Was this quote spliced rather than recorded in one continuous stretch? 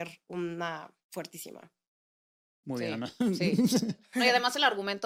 yes; 1 cut; at 1.0 s

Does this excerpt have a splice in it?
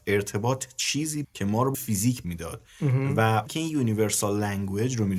yes; 4 cuts; at 1.2 s, 1.7 s, 2.2 s, 3.5 s

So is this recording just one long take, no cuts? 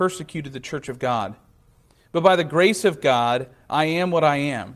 yes; 0 cuts

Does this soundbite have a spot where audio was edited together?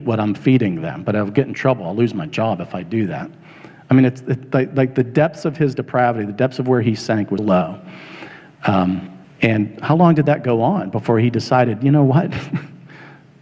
yes; 2 cuts; at 7.4 s, 9.2 s

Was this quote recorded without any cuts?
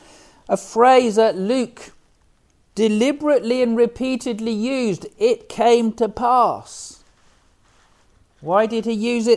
yes; 0 cuts

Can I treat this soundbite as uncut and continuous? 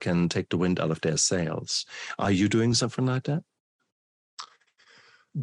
yes; 0 cuts

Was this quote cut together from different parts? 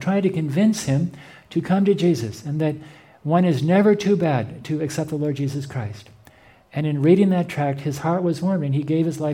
no; 0 cuts

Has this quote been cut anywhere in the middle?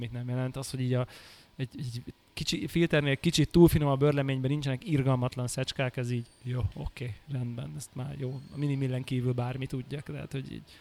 no; 0 cuts

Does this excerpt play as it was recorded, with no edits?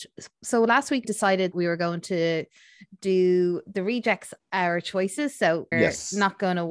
no; 4 cuts; at 1.0 s, 1.5 s, 4.4 s, 5.7 s

